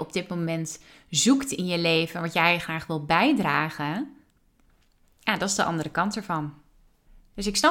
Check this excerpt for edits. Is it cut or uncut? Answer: uncut